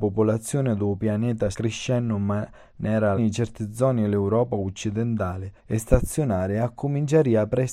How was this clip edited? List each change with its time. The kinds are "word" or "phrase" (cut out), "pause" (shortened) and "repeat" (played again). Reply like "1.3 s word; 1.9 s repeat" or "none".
1.5 s word; 3.2 s phrase; 5.6 s pause

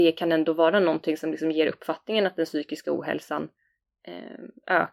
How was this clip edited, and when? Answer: none

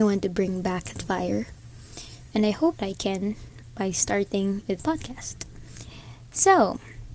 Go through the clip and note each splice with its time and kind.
0.9 s word; 2.8 s word; 4.8 s word

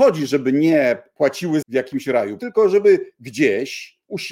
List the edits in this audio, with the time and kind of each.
1.6 s word; 2.4 s word

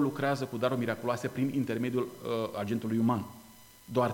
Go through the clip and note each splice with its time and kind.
none

